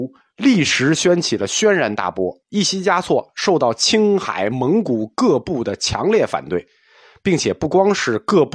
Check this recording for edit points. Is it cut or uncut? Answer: cut